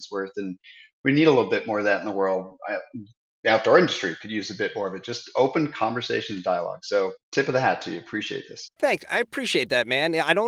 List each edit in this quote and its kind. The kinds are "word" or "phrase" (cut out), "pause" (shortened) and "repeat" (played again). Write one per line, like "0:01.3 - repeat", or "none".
0:07.2 - pause